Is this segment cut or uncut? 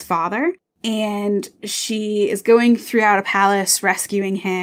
uncut